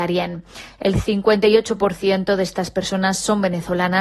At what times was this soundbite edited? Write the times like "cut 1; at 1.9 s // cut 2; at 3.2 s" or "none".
none